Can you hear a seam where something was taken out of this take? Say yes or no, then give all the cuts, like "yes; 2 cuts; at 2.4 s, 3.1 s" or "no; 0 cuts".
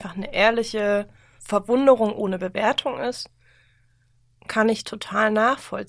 yes; 1 cut; at 1.4 s